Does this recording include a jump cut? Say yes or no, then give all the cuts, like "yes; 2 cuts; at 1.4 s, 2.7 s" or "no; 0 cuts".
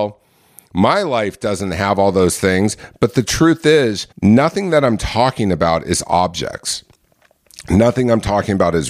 yes; 1 cut; at 4.1 s